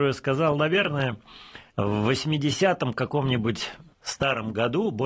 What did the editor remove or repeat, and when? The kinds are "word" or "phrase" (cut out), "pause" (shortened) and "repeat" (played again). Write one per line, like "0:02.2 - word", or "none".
0:01.7 - pause
0:03.9 - pause